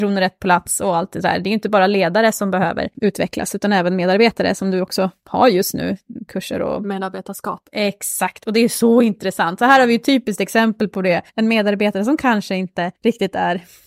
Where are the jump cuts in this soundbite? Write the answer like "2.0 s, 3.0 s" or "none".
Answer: 11.3 s, 13.0 s